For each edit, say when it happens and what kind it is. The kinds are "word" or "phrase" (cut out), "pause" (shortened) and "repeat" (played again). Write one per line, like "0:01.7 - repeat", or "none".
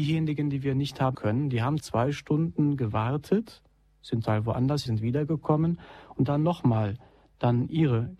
0:01.1 - word
0:01.8 - word
0:04.2 - word
0:04.9 - word
0:06.3 - word

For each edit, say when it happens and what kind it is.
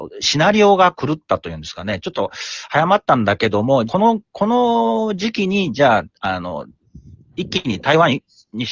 0:03.9 - phrase

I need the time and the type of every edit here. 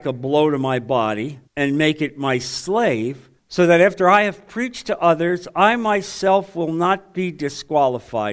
0:01.5 - pause
0:03.4 - pause

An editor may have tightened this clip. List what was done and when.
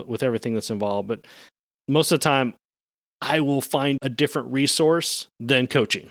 0:04.0 - word

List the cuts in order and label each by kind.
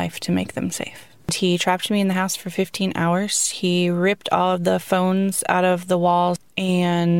none

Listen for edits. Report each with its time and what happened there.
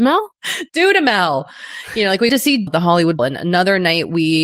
0:02.3 - word
0:02.7 - word
0:03.2 - word

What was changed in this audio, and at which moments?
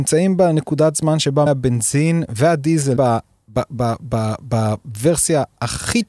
0:01.5 - word
0:03.0 - word

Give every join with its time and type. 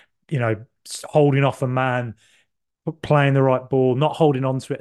none

